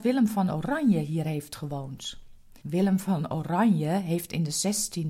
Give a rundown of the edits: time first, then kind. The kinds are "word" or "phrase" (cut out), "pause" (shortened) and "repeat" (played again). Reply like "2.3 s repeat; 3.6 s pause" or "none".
2.6 s pause